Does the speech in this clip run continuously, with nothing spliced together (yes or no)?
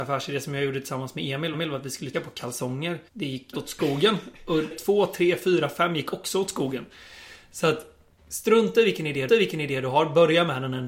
no